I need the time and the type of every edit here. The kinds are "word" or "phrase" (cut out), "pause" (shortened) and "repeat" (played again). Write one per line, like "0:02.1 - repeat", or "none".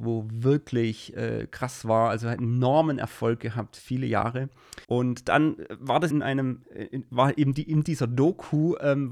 0:04.8 - pause
0:06.1 - word
0:06.6 - word